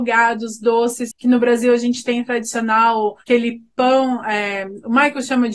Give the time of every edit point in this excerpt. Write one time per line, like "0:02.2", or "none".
0:03.2